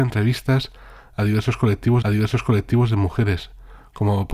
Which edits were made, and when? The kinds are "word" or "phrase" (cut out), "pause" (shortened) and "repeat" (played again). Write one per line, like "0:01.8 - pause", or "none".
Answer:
0:02.0 - repeat